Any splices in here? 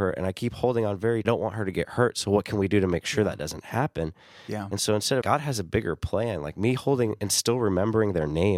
yes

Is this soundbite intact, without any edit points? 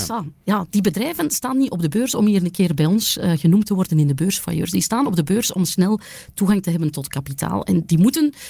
yes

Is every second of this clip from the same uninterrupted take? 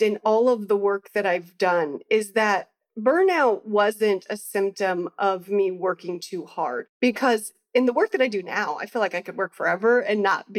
yes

